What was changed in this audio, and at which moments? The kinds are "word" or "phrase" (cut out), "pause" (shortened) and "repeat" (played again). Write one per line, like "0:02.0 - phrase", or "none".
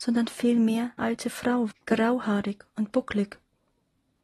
0:01.0 - word
0:01.7 - word